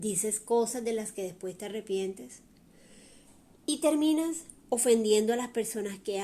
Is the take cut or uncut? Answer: uncut